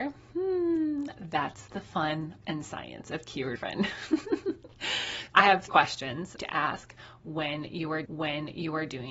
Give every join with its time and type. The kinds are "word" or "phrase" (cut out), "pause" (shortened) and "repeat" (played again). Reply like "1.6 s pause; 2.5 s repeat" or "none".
2.4 s word; 3.6 s phrase; 5.3 s word; 5.7 s word; 6.4 s phrase; 8.1 s repeat